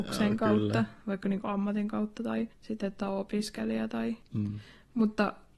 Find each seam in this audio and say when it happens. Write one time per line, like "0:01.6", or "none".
0:02.5